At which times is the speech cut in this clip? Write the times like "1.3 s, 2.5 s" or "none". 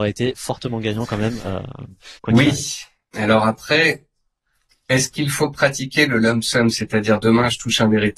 2.2 s